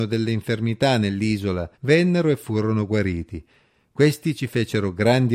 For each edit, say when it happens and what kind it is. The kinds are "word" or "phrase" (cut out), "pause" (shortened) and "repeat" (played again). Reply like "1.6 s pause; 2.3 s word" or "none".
1.7 s pause